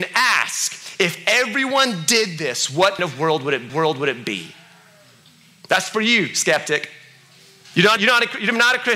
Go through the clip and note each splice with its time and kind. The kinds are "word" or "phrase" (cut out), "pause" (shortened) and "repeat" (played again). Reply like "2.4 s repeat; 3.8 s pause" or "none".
3.0 s word; 3.7 s repeat; 8.0 s word